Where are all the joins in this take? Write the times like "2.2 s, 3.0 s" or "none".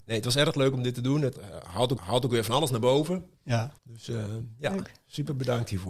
1.3 s, 2.0 s, 3.8 s

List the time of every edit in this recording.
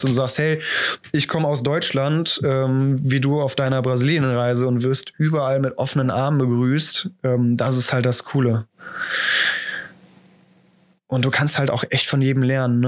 none

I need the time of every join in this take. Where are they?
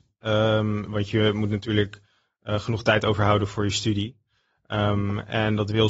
none

